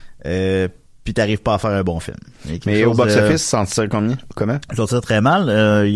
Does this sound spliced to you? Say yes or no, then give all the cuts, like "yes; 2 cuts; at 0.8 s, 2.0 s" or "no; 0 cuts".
no; 0 cuts